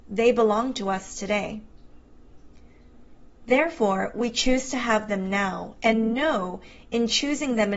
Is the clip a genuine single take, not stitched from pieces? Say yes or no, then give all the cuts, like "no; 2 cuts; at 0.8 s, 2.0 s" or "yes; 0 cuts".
yes; 0 cuts